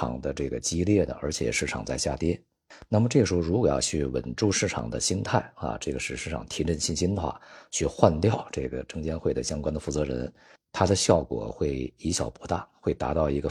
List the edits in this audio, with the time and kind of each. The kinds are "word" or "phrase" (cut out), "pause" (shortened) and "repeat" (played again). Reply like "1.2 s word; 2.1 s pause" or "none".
none